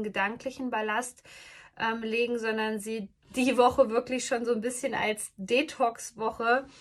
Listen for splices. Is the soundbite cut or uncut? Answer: uncut